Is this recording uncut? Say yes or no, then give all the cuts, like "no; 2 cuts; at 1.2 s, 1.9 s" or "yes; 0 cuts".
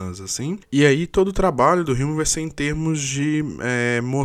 yes; 0 cuts